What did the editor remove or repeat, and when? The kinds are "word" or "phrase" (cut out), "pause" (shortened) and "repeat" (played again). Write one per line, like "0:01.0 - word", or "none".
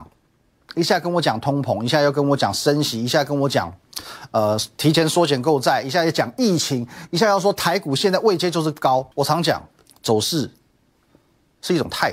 0:09.1 - pause
0:09.9 - pause